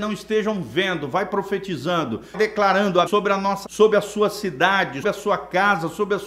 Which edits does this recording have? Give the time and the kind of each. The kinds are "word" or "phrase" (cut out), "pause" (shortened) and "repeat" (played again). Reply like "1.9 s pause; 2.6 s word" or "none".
2.3 s word; 3.1 s phrase; 3.6 s word; 5.0 s word